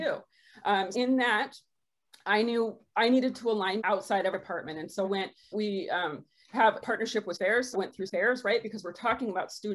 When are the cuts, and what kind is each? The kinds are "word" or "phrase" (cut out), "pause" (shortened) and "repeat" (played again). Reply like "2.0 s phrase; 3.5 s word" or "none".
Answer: 0.9 s word; 3.8 s word; 4.3 s word; 5.0 s word; 5.5 s word; 6.8 s word; 7.3 s word; 7.7 s word; 8.1 s word